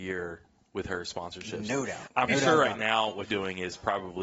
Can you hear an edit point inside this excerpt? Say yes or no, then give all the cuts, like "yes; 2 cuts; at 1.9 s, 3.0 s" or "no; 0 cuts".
yes; 2 cuts; at 2.3 s, 3.2 s